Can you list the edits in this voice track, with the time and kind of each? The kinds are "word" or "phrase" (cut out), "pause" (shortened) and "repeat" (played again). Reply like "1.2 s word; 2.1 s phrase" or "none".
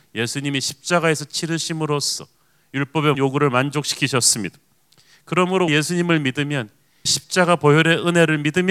3.1 s word; 5.7 s word; 7.1 s word